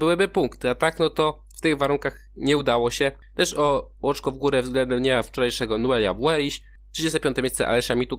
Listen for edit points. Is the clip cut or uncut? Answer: uncut